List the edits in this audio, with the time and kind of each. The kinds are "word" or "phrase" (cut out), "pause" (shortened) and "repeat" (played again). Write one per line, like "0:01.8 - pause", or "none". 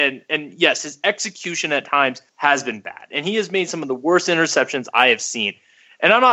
0:02.3 - pause